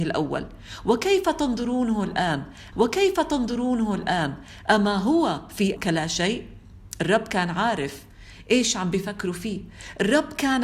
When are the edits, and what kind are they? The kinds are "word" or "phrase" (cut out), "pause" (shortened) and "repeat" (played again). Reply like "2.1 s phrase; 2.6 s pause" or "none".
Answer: 2.7 s repeat; 5.8 s word